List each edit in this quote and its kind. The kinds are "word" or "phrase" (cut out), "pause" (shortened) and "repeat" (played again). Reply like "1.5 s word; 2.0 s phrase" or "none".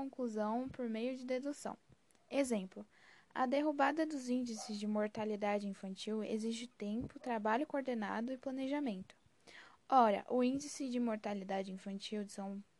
none